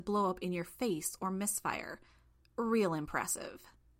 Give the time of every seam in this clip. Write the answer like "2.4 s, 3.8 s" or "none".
none